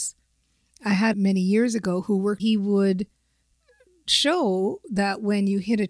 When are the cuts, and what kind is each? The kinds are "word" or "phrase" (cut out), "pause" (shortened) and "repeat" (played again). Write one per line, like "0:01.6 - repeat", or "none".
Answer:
0:01.1 - phrase
0:02.4 - phrase